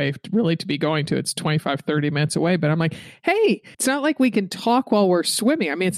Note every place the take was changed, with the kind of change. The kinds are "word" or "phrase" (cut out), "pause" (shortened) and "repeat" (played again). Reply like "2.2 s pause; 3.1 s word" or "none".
3.7 s pause

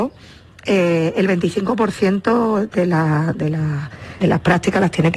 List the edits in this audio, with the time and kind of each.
4.2 s word

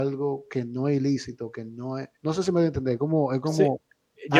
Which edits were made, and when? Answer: 2.1 s pause

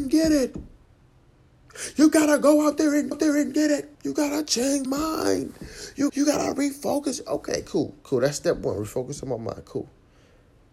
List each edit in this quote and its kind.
3.1 s repeat; 3.9 s pause; 4.9 s word; 6.1 s word

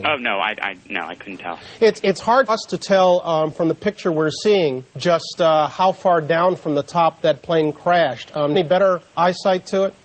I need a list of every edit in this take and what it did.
2.5 s word; 4.9 s pause; 8.5 s phrase; 9.1 s pause

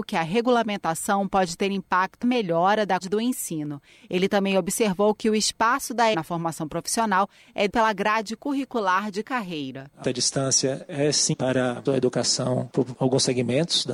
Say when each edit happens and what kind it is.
2.2 s word; 3.0 s word; 6.1 s word; 7.7 s word; 9.2 s word; 10.0 s word; 11.3 s word; 11.9 s word

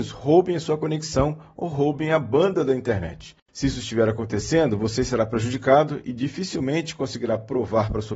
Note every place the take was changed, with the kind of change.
3.4 s pause

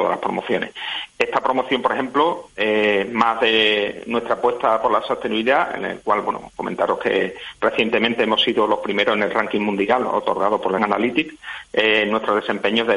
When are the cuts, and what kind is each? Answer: 10.8 s phrase

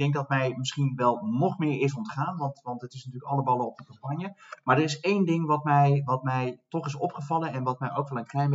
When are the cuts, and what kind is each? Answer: none

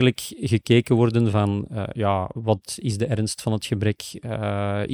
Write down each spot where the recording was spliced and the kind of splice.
none

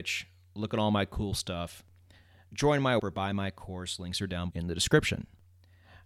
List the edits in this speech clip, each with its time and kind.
3.0 s word; 4.5 s word

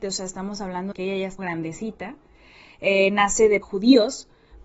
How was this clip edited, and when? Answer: 0.9 s word; 1.4 s word; 3.6 s word

